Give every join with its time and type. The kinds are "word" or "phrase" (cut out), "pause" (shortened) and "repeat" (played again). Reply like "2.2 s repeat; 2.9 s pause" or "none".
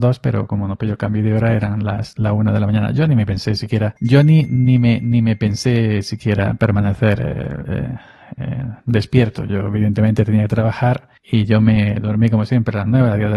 4.0 s pause; 8.8 s pause; 11.2 s pause